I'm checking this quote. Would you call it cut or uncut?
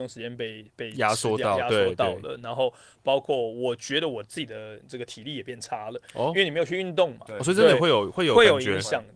uncut